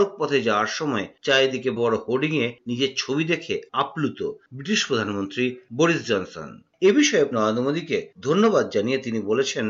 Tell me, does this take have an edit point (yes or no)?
yes